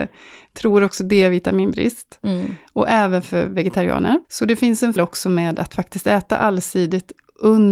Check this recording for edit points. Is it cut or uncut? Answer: cut